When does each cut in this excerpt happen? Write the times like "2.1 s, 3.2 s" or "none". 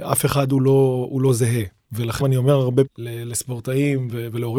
2.2 s, 2.9 s